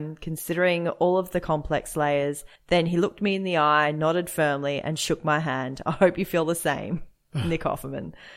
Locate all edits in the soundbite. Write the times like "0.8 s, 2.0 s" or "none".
2.6 s